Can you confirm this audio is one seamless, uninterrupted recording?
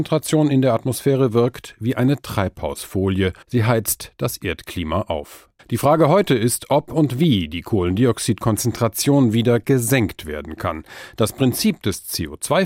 no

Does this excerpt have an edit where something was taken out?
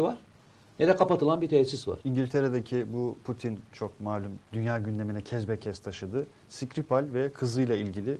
yes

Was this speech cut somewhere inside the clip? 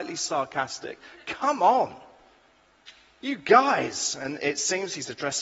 no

